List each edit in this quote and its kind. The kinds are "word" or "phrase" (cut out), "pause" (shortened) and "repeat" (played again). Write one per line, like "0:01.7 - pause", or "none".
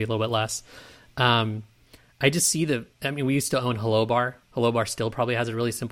0:02.9 - pause
0:04.4 - pause

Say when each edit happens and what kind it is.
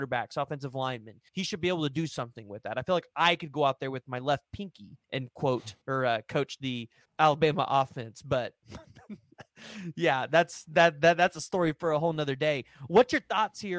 0:01.3 - pause
0:05.0 - pause
0:05.8 - pause
0:07.0 - pause

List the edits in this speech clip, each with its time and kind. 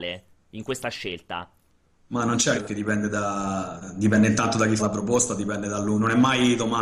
0:02.5 - word
0:04.8 - word

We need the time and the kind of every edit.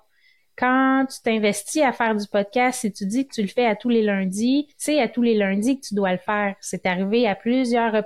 0:04.7 - pause

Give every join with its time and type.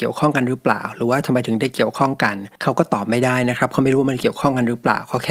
0:02.6 - pause

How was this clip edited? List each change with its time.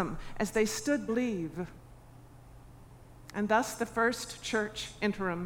0:01.1 - phrase

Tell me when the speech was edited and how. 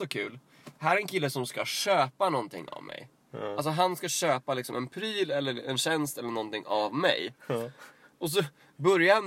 none

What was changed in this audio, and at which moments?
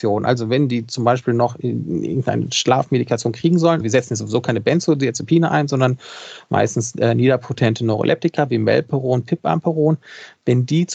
0:03.8 - word

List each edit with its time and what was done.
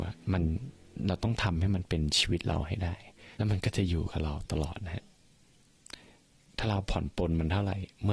0:03.3 - pause

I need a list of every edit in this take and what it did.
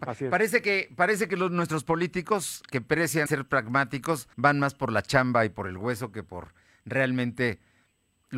0:03.3 - word
0:04.3 - pause

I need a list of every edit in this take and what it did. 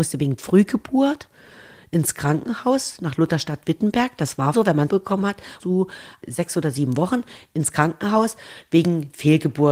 0:04.5 - word
0:04.9 - word
0:05.6 - word

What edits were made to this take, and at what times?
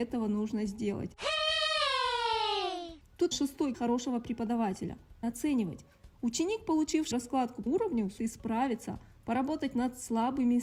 0:03.3 - word
0:03.7 - word
0:05.2 - word
0:07.1 - word
0:07.7 - word
0:08.2 - word

